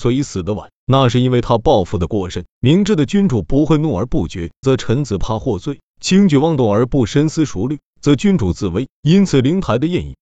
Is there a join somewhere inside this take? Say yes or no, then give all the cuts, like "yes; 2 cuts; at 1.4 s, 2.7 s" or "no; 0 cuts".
yes; 1 cut; at 4.6 s